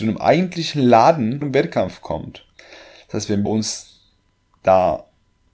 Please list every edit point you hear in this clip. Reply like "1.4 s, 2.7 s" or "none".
1.4 s, 3.5 s

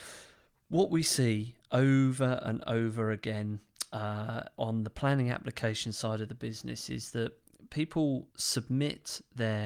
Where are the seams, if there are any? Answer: 8.3 s

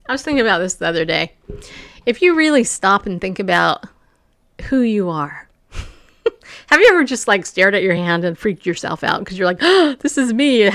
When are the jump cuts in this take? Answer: none

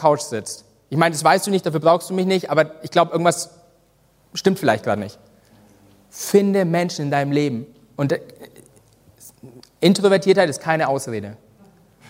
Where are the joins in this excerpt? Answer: none

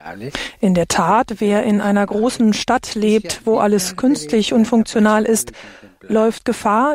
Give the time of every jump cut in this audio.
none

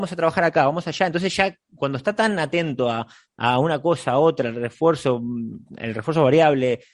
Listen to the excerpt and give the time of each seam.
none

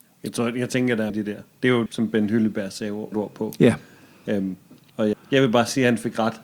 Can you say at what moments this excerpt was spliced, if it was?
1.1 s, 1.9 s, 3.1 s, 5.1 s

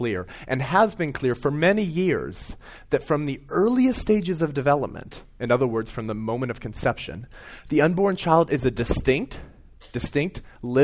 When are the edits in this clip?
9.9 s

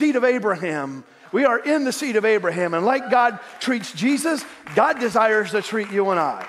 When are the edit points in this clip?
none

